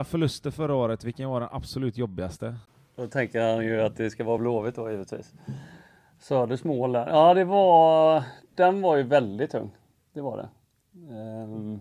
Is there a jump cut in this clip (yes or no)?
no